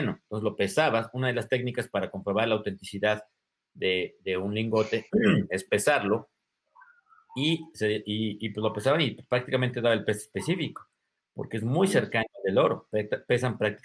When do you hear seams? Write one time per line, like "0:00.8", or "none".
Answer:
none